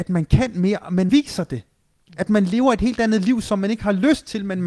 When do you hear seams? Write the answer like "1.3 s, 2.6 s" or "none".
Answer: 1.1 s